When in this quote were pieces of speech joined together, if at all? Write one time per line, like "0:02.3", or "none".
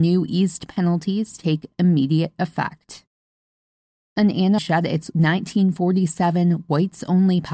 0:04.6

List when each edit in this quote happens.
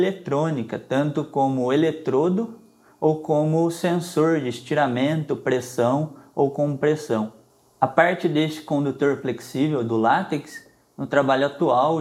none

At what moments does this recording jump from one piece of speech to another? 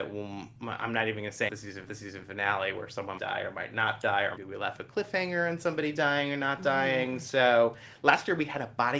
0:01.5
0:01.9
0:03.2
0:04.4

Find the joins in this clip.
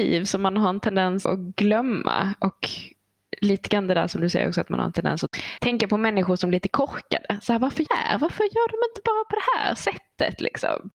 0:01.2
0:07.9

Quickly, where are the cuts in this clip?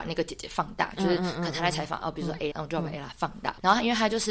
0:02.5

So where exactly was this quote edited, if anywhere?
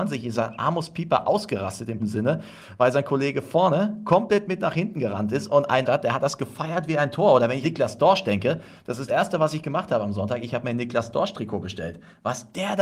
0:02.0
0:05.8
0:07.6
0:09.1

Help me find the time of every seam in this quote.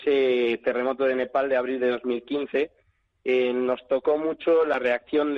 none

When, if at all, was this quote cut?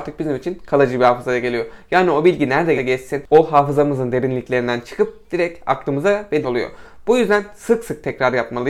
0:02.8
0:06.4

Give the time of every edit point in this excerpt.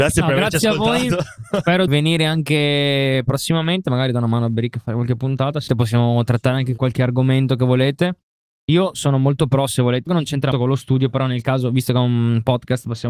0:01.9
0:05.7
0:06.8
0:10.1
0:10.5

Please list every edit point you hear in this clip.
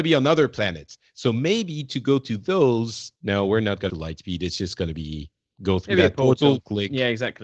0:03.2
0:03.9

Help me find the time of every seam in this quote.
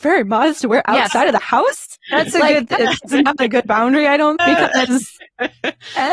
0:03.0
0:04.4

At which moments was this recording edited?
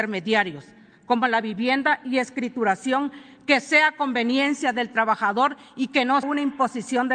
0:06.2

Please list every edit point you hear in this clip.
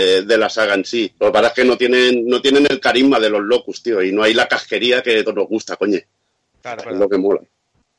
0:01.2
0:05.3
0:06.8

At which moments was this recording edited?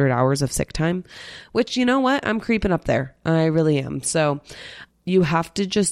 0:04.9

